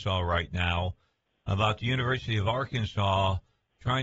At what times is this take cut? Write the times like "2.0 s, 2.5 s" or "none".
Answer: none